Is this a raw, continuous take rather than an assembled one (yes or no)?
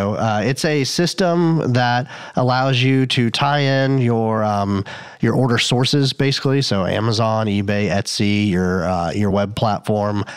yes